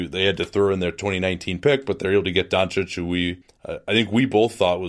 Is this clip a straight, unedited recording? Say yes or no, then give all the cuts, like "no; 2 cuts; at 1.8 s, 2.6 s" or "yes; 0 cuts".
yes; 0 cuts